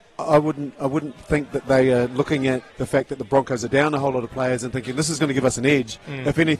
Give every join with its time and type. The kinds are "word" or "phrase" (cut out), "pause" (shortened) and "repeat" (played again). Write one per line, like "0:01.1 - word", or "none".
0:02.7 - pause